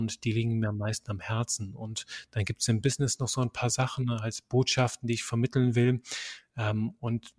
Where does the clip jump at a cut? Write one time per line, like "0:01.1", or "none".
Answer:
none